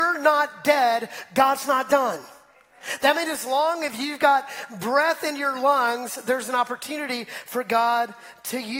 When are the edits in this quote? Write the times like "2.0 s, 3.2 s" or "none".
none